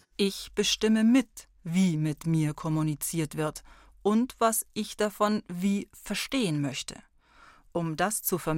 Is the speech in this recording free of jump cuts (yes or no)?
yes